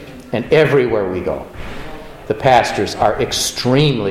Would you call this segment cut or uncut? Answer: uncut